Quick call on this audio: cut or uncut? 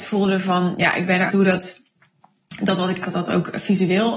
cut